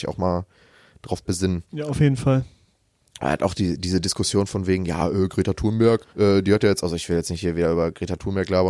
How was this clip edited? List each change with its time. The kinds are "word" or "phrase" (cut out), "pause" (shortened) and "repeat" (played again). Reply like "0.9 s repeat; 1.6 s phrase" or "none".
1.7 s pause; 6.1 s pause